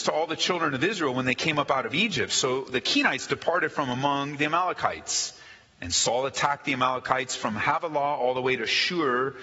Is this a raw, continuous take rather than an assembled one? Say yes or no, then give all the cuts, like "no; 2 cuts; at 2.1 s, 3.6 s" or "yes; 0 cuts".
yes; 0 cuts